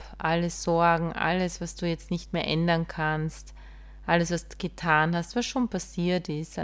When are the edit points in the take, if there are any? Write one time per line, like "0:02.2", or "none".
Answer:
none